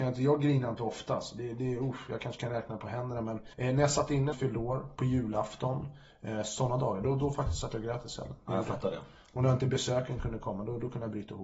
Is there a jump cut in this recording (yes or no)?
yes